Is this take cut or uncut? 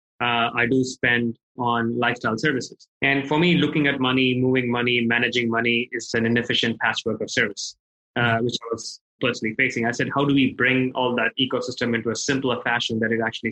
cut